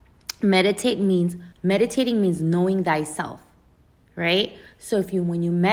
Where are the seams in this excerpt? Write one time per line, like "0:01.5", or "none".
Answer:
0:01.5